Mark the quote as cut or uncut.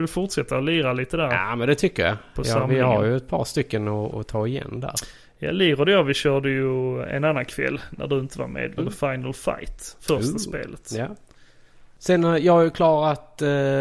cut